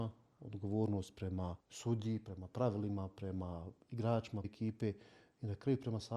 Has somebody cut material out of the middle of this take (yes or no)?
yes